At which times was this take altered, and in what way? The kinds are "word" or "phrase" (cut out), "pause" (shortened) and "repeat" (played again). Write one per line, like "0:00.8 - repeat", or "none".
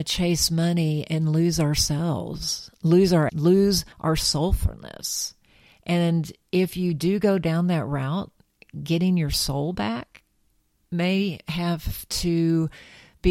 0:03.3 - word
0:03.9 - pause